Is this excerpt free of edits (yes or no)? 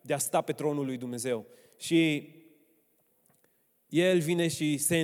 yes